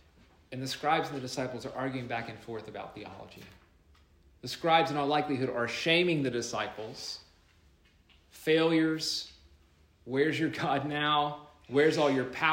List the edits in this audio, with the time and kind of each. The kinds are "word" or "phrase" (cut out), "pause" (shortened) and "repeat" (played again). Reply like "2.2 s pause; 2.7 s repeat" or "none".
none